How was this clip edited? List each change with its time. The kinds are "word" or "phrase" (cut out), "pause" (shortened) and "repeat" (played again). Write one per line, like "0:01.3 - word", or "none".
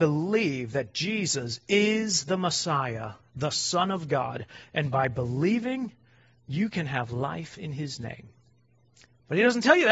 none